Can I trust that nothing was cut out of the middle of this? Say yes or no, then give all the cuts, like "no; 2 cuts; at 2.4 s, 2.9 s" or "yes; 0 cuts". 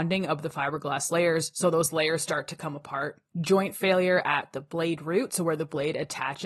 no; 1 cut; at 3.3 s